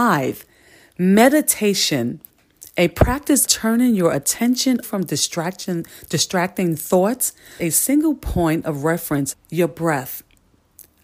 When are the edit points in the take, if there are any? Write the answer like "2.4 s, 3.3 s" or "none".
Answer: 3.5 s, 4.8 s, 7.6 s, 9.3 s